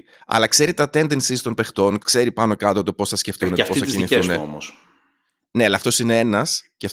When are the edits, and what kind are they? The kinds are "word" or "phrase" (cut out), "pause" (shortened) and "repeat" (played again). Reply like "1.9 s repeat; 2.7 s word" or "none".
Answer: 2.0 s word